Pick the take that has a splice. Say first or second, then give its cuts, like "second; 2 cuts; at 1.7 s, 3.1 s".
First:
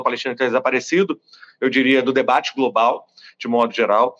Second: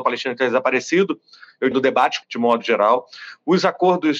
second; 2 cuts; at 1.7 s, 2.2 s